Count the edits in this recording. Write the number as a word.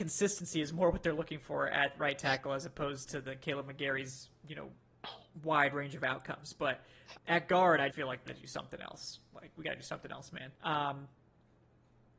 four